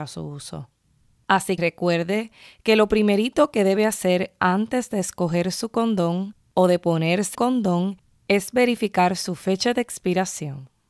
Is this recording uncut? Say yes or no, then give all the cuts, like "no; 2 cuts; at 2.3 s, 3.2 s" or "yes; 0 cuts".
no; 2 cuts; at 1.6 s, 7.3 s